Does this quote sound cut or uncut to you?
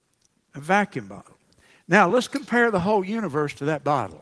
uncut